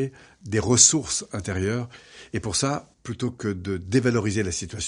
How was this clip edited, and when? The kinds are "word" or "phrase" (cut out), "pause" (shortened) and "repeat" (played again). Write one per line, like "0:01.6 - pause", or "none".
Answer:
0:02.9 - pause